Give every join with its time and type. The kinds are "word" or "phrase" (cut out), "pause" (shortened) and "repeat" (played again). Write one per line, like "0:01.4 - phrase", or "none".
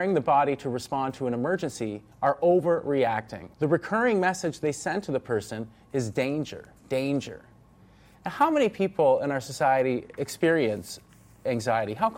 0:02.1 - pause
0:03.5 - pause
0:06.8 - pause